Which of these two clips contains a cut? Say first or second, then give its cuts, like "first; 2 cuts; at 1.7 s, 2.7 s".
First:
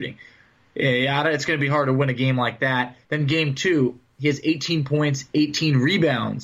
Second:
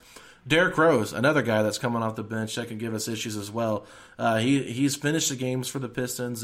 first; 1 cut; at 3.0 s